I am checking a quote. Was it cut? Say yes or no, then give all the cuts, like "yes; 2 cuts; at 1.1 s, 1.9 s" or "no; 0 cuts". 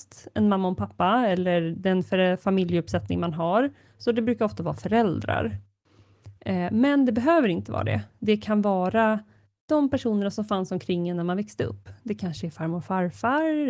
no; 0 cuts